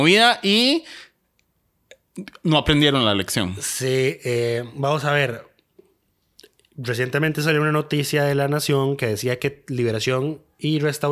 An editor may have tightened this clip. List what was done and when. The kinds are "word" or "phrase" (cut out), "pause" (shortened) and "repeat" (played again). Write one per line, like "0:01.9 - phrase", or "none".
none

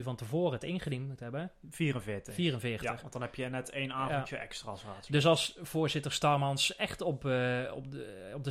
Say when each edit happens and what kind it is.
none

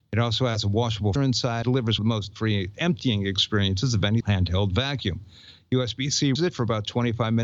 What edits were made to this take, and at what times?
0:01.2 - word
0:01.6 - word
0:02.0 - phrase
0:02.3 - word
0:04.2 - word
0:06.4 - word

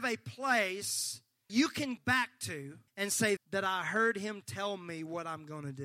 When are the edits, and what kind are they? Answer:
0:01.5 - word
0:02.0 - word
0:02.9 - pause
0:03.4 - phrase

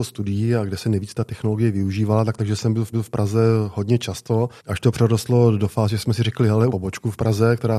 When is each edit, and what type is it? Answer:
0:02.4 - phrase
0:02.9 - repeat
0:04.6 - pause
0:06.7 - word

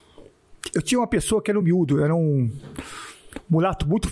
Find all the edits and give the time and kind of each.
none

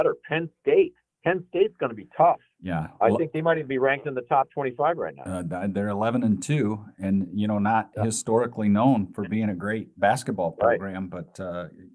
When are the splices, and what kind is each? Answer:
0:01.1 - pause

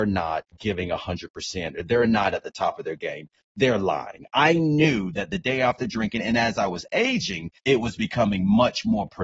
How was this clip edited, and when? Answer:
0:07.6 - pause

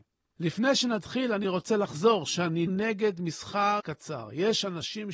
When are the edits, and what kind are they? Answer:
0:02.7 - word
0:03.8 - word

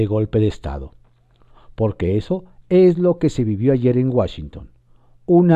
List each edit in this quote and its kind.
none

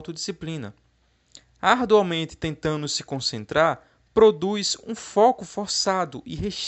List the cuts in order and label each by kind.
none

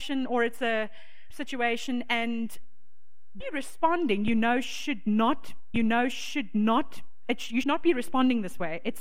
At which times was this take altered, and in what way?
0:01.3 - word
0:03.4 - word
0:05.7 - repeat
0:07.6 - word

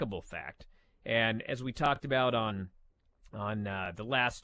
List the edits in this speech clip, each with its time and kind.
none

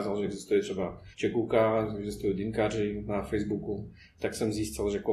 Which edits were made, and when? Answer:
0:01.1 - pause

